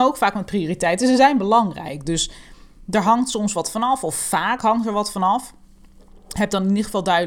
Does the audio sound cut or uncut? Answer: uncut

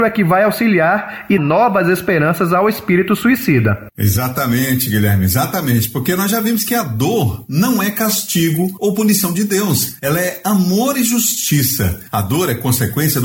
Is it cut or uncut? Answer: cut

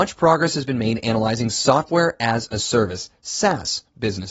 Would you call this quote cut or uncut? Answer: uncut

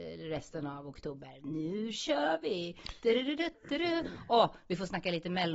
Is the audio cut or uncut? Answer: uncut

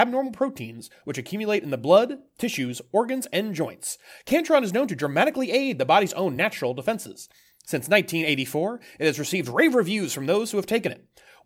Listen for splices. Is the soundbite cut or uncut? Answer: uncut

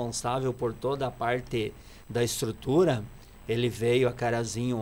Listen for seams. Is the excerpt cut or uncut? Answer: uncut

